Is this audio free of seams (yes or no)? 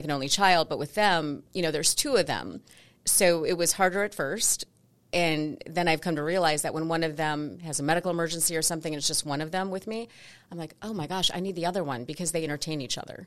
yes